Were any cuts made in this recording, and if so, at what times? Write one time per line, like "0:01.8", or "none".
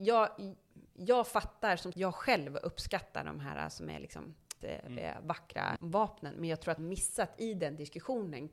0:01.9
0:04.6
0:05.8
0:06.8